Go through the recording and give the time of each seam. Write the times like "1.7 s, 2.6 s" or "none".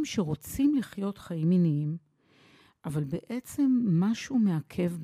none